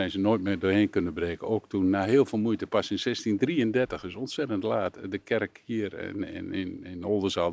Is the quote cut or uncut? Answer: uncut